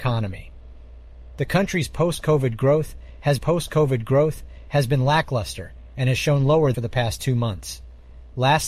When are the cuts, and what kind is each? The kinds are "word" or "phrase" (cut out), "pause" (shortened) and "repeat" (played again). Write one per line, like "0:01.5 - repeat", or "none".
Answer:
0:03.4 - repeat
0:06.7 - phrase